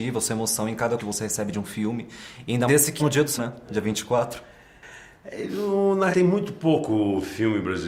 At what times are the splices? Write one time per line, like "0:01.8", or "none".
0:01.0
0:02.7
0:03.0
0:03.4
0:06.1